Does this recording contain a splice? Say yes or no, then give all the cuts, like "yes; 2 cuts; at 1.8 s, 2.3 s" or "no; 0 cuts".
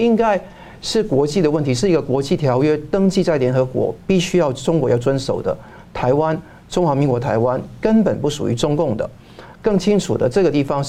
no; 0 cuts